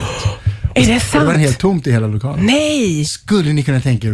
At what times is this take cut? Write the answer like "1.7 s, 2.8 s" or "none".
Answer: 1.3 s